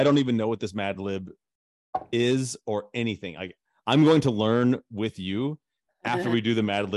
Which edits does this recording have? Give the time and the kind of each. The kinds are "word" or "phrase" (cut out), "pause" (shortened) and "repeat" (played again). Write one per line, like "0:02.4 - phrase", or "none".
none